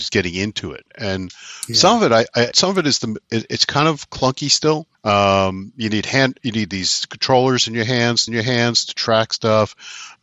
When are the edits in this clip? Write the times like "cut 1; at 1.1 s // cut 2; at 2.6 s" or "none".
cut 1; at 2.5 s // cut 2; at 4.9 s // cut 3; at 8.3 s